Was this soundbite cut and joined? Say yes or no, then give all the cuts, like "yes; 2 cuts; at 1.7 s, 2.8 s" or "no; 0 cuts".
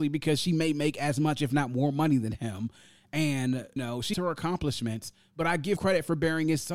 yes; 3 cuts; at 3.8 s, 4.1 s, 5.8 s